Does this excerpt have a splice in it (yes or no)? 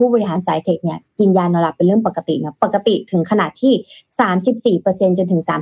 no